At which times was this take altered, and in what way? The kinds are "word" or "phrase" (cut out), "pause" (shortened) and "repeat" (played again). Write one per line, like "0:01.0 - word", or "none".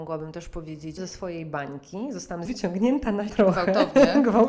0:01.0 - word
0:02.5 - word
0:03.3 - word